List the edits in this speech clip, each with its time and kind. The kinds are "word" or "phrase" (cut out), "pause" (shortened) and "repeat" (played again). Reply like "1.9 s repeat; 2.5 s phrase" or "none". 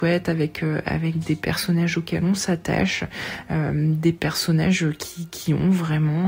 none